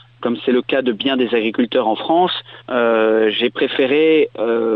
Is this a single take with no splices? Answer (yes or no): no